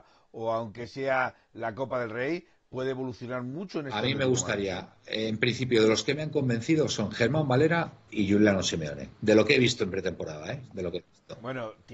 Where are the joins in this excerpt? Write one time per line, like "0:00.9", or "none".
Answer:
0:08.1
0:09.1